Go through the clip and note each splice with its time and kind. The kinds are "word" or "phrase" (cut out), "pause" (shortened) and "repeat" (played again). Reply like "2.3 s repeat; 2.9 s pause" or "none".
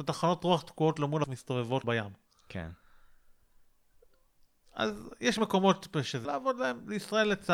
1.2 s word; 1.8 s word; 6.2 s word